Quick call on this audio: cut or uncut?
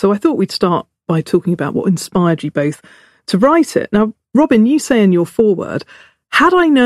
uncut